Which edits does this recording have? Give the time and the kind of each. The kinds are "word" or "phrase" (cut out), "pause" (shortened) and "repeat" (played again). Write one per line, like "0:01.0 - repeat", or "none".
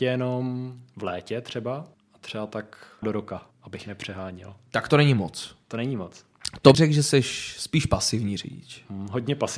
0:01.9 - pause
0:03.0 - word
0:03.5 - pause
0:06.7 - word